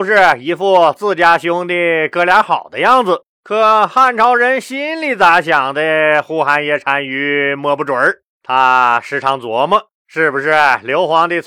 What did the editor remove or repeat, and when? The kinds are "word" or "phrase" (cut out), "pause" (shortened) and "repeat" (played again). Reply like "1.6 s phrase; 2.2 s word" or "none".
3.3 s pause; 8.3 s pause; 10.0 s pause